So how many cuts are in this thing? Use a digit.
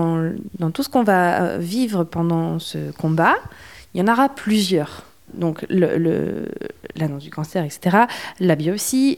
0